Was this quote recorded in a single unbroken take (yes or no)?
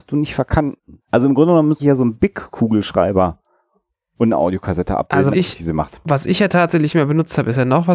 no